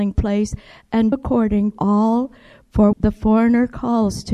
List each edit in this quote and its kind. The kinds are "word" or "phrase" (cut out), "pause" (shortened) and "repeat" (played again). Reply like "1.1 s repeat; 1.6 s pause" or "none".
1.1 s word; 1.7 s word; 2.9 s word